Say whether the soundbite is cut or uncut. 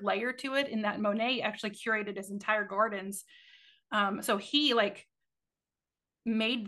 uncut